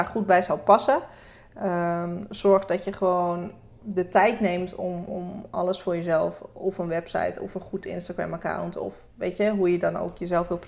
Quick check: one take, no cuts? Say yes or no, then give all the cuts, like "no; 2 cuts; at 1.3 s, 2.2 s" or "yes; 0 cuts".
yes; 0 cuts